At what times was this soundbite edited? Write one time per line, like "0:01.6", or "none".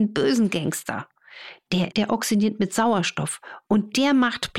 0:01.9